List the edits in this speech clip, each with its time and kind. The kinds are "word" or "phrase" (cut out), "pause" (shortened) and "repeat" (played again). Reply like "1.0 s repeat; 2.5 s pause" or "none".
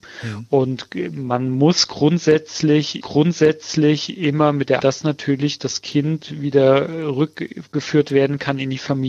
3.0 s repeat; 4.8 s phrase